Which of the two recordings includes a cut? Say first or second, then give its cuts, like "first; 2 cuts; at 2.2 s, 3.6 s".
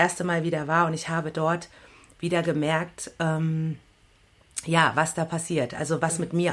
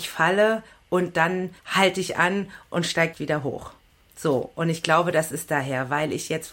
second; 3 cuts; at 1.6 s, 3.1 s, 3.9 s